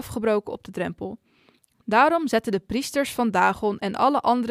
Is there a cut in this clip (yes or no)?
no